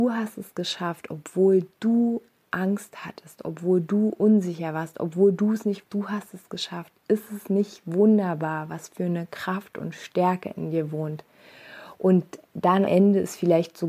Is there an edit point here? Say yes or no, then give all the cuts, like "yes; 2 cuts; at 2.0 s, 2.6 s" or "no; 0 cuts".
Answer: yes; 2 cuts; at 5.8 s, 12.9 s